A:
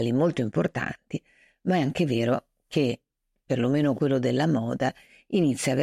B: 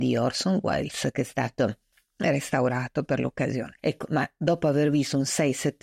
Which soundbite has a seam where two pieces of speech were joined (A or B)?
B